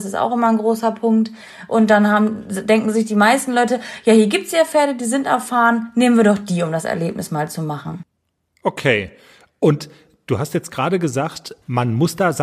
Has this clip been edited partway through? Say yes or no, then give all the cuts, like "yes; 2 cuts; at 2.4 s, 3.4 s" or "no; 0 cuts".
no; 0 cuts